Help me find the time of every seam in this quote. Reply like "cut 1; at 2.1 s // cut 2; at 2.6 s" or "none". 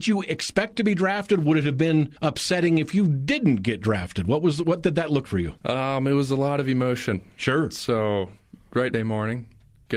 cut 1; at 2.2 s // cut 2; at 5.2 s // cut 3; at 5.6 s // cut 4; at 8.9 s

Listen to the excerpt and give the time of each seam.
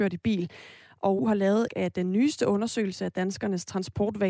cut 1; at 1.2 s // cut 2; at 1.7 s

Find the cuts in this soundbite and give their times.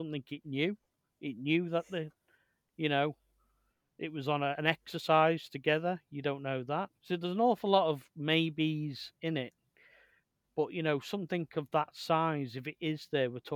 cut 1; at 7.0 s

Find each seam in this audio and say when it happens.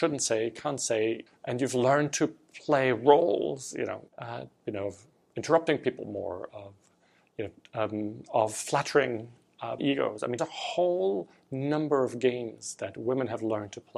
cut 1; at 1.3 s // cut 2; at 4.1 s // cut 3; at 9.8 s // cut 4; at 10.4 s

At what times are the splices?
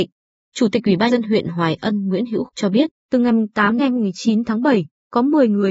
cut 1; at 1.1 s // cut 2; at 2.5 s // cut 3; at 3.8 s

